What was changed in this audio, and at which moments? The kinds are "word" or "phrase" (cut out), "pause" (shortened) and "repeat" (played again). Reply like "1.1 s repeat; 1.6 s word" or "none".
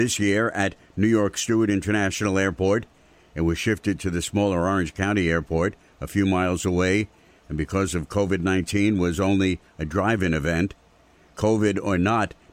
none

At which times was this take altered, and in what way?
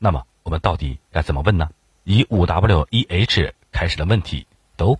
none

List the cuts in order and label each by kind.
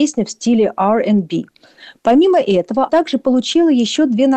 2.9 s word

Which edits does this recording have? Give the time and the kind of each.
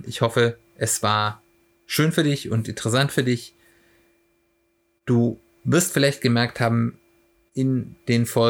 none

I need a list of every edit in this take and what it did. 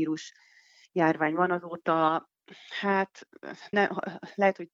3.7 s word

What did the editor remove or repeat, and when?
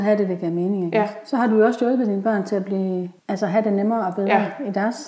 3.2 s pause

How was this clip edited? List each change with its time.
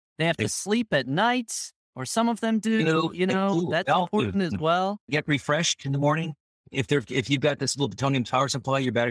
none

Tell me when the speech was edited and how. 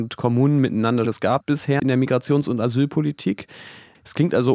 1.0 s word; 1.4 s word; 1.8 s word

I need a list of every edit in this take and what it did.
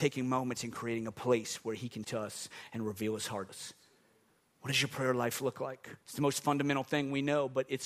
2.0 s word; 3.5 s word; 6.0 s pause

